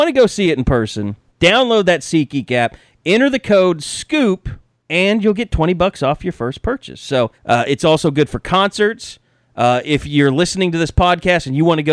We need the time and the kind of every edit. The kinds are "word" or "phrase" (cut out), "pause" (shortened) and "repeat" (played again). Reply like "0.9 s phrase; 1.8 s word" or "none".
1.3 s pause; 4.7 s pause; 7.4 s pause